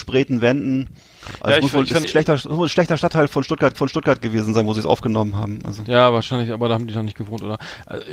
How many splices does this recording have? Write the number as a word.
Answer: two